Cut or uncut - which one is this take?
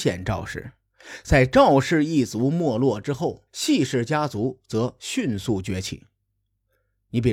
cut